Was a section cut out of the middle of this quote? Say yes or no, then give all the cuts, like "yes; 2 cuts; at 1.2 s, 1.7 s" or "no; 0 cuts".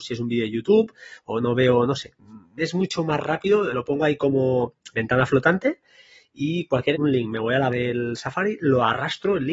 yes; 4 cuts; at 3.7 s, 4.9 s, 6.9 s, 7.7 s